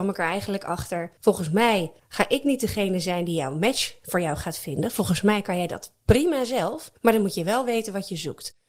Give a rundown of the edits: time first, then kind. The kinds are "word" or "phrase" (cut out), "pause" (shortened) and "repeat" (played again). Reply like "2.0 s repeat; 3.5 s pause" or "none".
1.2 s pause; 2.0 s pause; 7.0 s pause

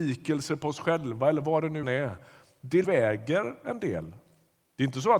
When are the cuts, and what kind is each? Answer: 1.8 s word; 2.8 s phrase

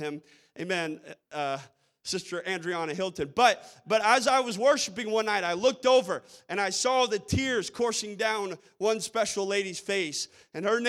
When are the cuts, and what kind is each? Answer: none

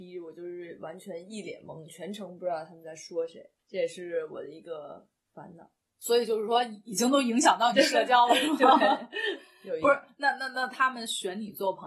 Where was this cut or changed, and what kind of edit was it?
3.6 s pause; 5.8 s pause

